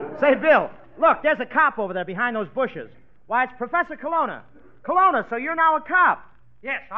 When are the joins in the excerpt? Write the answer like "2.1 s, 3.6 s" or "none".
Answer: none

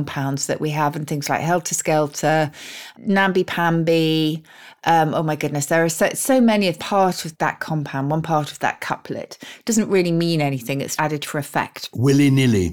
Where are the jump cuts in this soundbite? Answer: 6.8 s, 11.0 s

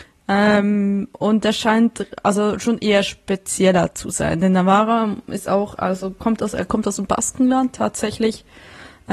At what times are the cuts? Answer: none

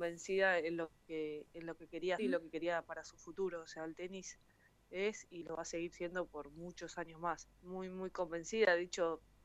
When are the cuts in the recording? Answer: 2.2 s, 5.4 s, 7.4 s

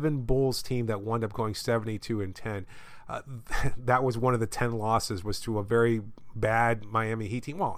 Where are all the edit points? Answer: none

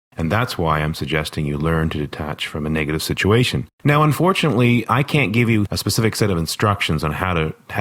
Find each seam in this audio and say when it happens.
3.7 s, 4.9 s

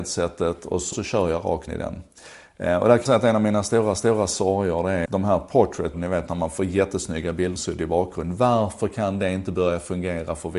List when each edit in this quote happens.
0.9 s, 1.7 s, 3.1 s, 4.0 s, 5.1 s, 5.9 s, 7.6 s

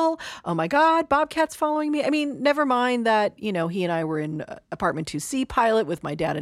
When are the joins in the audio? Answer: none

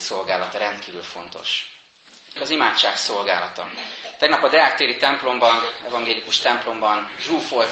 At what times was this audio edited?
2.4 s

